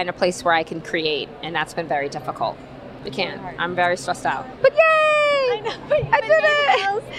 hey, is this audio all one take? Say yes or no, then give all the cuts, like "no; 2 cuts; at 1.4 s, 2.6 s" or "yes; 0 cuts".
yes; 0 cuts